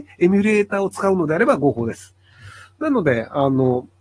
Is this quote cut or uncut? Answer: uncut